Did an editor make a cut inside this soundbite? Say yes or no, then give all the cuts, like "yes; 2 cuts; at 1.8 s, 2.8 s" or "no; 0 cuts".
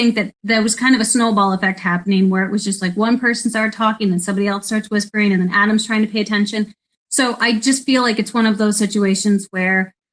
no; 0 cuts